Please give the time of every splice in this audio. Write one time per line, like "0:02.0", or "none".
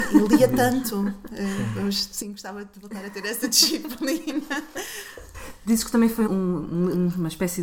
0:06.3